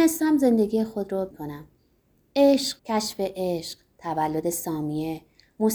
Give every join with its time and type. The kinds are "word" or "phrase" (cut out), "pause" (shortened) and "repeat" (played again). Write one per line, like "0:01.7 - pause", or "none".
0:01.3 - phrase
0:02.8 - word